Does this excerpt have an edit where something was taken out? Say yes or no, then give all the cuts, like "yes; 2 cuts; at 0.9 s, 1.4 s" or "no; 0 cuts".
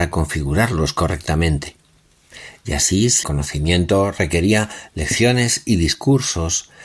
yes; 1 cut; at 3.2 s